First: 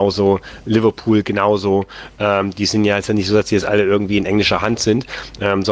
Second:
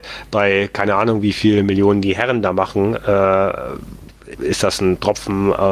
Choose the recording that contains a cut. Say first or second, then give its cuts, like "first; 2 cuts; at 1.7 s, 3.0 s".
second; 1 cut; at 4.3 s